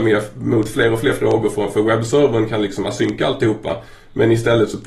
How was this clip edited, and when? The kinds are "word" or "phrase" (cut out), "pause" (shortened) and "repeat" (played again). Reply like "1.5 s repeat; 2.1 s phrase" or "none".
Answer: none